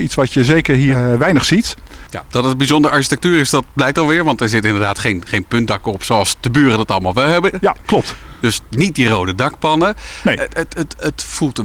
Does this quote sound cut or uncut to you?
uncut